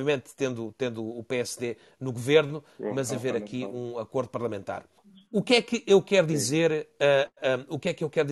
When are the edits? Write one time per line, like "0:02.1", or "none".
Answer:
0:05.0